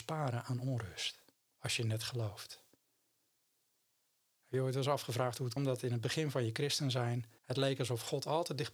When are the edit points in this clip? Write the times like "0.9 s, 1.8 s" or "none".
5.6 s, 7.4 s